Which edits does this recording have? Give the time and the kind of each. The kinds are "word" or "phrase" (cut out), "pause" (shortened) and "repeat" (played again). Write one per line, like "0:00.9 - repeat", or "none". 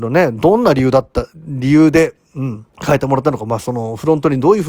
0:02.7 - pause